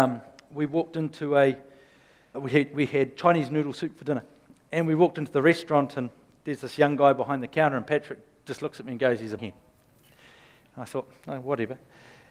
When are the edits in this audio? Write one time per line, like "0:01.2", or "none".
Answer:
0:02.3
0:09.4